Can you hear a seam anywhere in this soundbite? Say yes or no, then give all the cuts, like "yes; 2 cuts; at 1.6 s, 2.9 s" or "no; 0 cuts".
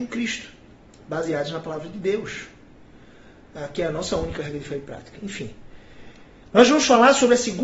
no; 0 cuts